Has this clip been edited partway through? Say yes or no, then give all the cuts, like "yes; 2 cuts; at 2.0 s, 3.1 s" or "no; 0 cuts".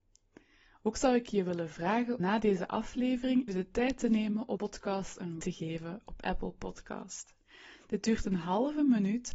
yes; 4 cuts; at 2.2 s, 3.5 s, 4.6 s, 5.4 s